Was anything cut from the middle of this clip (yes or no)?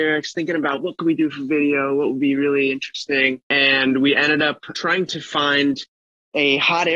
no